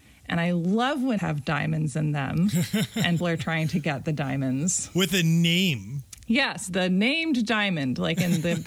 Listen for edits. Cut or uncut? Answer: cut